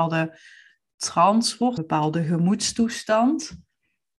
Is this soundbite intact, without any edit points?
no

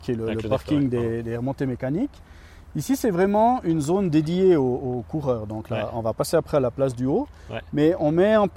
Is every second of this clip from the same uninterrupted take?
yes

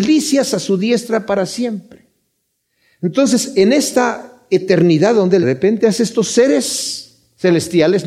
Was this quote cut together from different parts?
yes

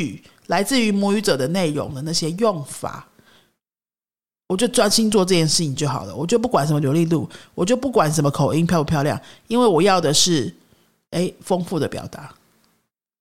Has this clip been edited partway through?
no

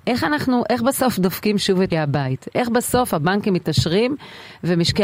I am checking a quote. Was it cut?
yes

